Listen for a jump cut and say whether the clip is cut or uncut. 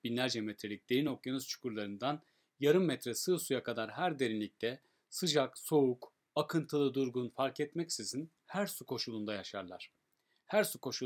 uncut